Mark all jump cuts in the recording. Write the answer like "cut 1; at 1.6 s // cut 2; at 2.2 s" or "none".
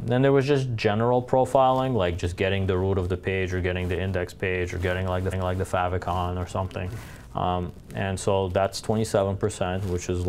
cut 1; at 5.3 s